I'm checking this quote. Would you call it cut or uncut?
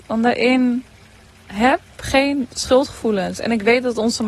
uncut